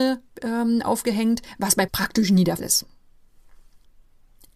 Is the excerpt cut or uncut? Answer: cut